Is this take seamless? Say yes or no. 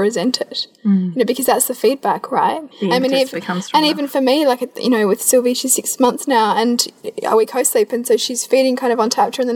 no